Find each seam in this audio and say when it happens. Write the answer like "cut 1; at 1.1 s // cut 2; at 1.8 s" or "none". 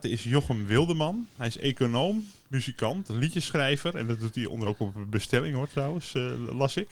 cut 1; at 4.6 s